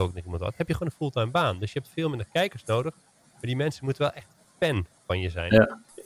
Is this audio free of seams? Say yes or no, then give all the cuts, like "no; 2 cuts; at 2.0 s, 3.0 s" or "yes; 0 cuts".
yes; 0 cuts